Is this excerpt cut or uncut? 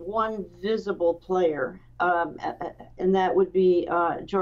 uncut